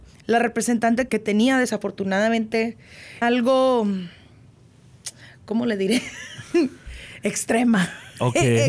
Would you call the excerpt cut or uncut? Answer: cut